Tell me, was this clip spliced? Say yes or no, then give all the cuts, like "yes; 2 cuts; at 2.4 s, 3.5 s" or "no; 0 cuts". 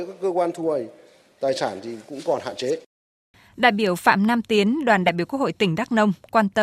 no; 0 cuts